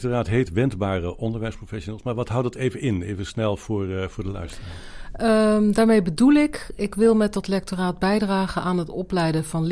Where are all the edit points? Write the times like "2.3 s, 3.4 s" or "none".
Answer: none